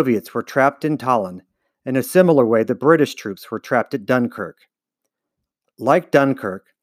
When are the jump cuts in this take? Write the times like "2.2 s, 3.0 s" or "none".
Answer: none